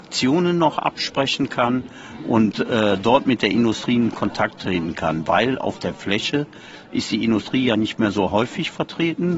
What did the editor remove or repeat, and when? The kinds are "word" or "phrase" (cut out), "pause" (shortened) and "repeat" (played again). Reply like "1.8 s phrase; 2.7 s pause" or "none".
none